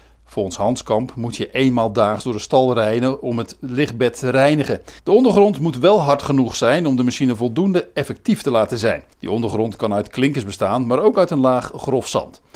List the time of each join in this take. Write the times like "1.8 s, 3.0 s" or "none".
5.0 s, 9.1 s